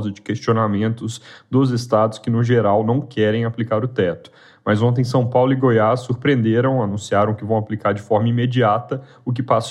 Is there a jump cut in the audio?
no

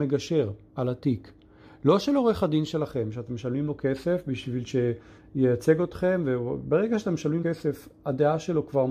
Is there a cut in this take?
yes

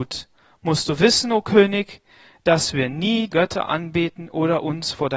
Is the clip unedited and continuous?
no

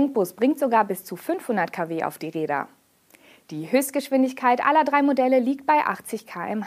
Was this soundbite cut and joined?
no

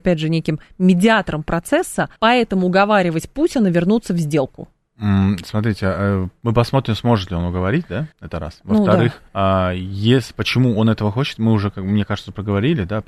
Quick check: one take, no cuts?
no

